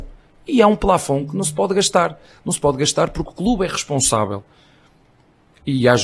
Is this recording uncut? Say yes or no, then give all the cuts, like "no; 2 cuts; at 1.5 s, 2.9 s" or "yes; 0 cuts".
yes; 0 cuts